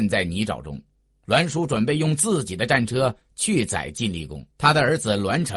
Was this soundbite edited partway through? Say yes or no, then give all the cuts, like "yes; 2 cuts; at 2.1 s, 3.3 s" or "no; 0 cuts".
yes; 1 cut; at 4.5 s